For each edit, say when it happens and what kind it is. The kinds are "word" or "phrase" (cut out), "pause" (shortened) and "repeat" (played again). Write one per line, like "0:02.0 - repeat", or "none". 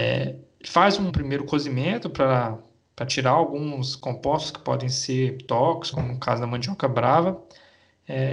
0:01.1 - word
0:05.9 - word